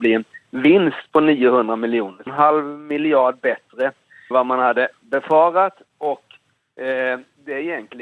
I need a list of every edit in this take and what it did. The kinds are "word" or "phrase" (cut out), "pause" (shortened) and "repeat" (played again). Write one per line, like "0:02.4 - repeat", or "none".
0:02.3 - phrase
0:04.3 - word

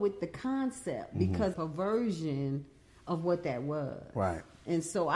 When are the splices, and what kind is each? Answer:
0:01.5 - word

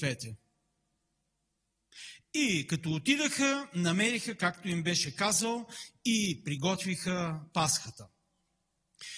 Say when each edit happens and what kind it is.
none

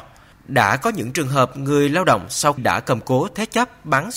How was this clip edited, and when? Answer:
0:02.6 - word

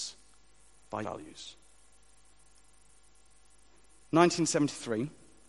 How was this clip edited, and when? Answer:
0:01.0 - phrase

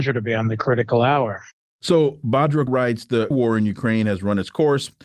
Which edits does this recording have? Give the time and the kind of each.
0:02.7 - word
0:03.3 - word

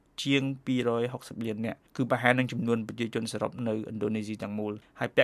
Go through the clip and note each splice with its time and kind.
0:01.9 - pause

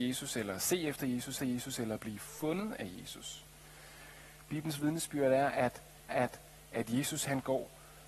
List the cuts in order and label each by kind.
0:01.4 - repeat
0:06.1 - repeat

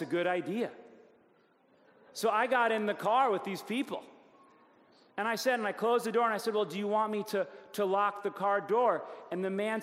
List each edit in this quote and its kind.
none

